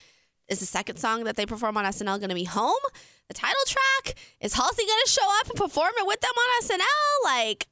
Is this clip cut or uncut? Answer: uncut